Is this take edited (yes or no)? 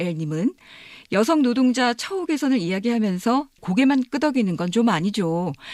yes